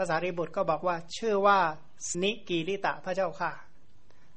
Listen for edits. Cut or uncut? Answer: cut